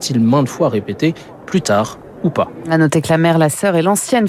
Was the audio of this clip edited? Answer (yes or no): no